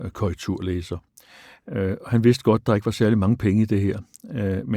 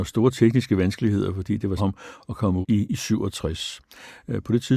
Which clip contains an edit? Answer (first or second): second